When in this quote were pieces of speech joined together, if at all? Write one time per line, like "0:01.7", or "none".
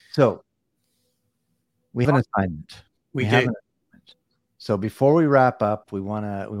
0:02.0